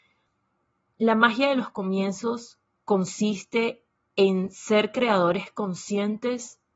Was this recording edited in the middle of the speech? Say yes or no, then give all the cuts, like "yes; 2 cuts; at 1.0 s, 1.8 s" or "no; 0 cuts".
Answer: no; 0 cuts